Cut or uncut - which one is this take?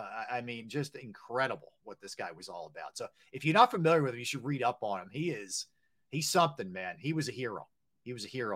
uncut